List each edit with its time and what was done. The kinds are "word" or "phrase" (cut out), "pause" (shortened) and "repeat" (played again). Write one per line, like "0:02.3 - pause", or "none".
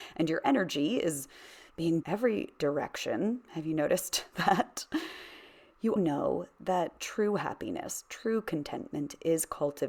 0:02.0 - phrase
0:06.0 - word